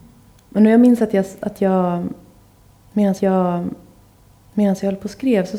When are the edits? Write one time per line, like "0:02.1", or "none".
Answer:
0:03.2